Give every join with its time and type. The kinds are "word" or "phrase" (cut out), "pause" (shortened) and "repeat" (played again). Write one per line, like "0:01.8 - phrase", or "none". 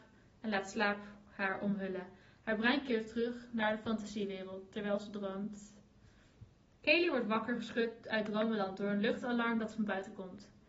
none